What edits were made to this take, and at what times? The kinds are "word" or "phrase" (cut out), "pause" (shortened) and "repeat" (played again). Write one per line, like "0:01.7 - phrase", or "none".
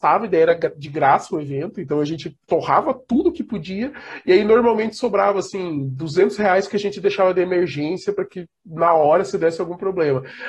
none